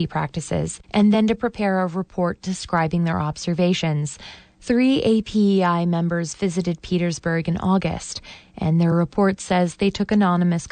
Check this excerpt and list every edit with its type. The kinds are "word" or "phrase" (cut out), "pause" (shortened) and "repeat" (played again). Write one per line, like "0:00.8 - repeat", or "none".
none